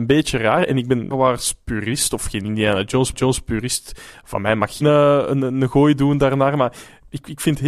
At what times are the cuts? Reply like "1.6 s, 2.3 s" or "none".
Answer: 1.1 s, 3.1 s, 4.8 s